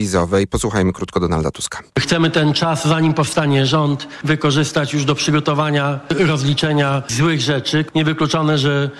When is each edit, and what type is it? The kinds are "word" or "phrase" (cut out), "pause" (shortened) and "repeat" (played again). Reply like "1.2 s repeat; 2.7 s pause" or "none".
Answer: 1.9 s pause